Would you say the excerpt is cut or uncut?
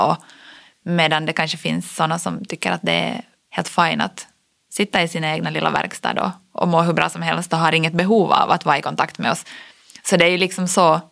cut